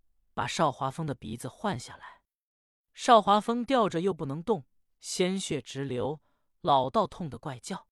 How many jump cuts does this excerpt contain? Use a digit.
0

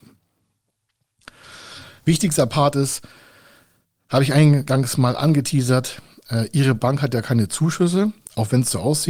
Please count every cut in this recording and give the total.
0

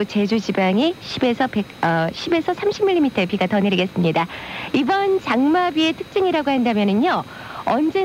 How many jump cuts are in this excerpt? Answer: 0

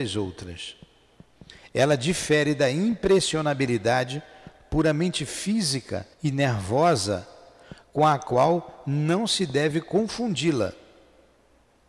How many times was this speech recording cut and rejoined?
1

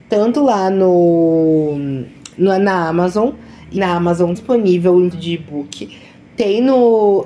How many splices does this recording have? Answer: 3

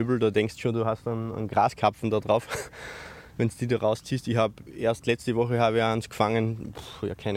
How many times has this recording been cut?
0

